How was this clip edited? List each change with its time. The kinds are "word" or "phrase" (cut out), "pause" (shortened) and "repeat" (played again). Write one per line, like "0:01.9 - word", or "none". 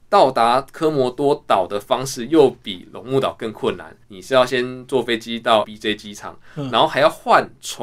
0:04.0 - pause
0:05.6 - word